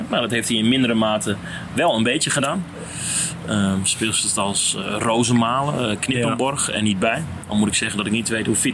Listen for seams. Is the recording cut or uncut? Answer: uncut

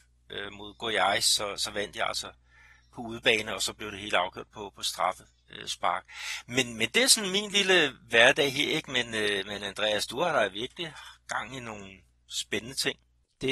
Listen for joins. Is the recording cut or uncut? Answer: uncut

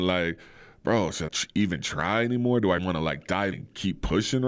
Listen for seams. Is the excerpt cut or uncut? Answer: cut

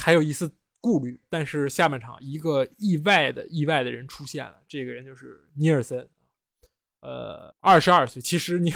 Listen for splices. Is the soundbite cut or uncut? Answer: cut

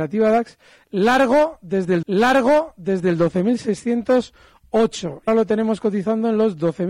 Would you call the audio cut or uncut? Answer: cut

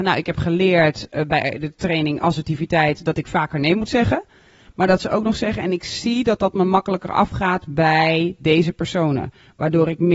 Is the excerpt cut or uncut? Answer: uncut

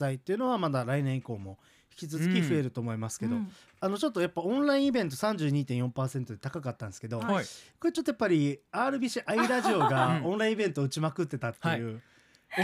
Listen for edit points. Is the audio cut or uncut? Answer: uncut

